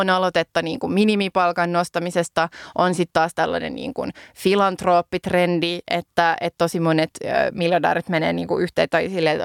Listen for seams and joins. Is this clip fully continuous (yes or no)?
yes